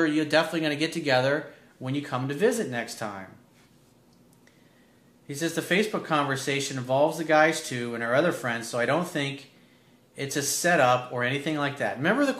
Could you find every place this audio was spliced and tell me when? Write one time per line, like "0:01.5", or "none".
none